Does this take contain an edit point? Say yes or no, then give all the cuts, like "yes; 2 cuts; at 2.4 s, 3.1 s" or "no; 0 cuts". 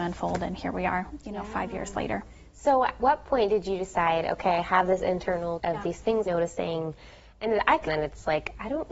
yes; 4 cuts; at 3.0 s, 5.6 s, 6.3 s, 7.9 s